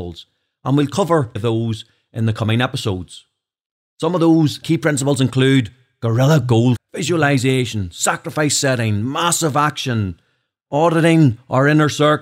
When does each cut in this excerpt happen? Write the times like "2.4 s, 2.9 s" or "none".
1.4 s, 4.6 s, 6.7 s